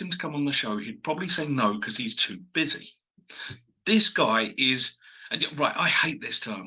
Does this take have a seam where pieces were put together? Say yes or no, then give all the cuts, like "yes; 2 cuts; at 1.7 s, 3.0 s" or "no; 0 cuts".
no; 0 cuts